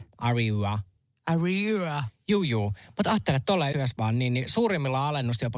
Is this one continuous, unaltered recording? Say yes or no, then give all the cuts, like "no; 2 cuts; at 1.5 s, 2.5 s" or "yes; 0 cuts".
no; 1 cut; at 3.7 s